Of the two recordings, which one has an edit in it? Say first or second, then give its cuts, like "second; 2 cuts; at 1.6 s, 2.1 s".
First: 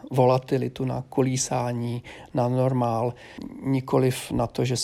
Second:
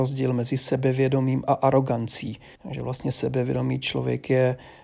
second; 1 cut; at 2.6 s